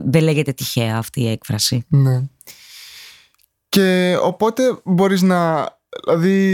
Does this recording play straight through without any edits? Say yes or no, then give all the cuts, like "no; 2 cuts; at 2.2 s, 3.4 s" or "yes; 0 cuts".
yes; 0 cuts